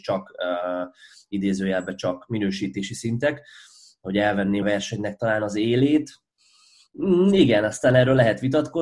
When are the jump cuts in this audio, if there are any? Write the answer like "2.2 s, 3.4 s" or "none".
4.6 s